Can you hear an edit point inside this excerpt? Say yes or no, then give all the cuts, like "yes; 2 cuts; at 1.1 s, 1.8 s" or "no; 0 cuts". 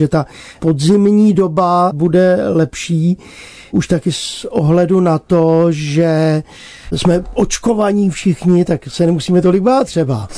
no; 0 cuts